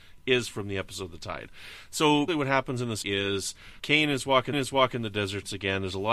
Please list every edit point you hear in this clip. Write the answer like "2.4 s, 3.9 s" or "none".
2.3 s, 3.0 s, 3.8 s, 4.5 s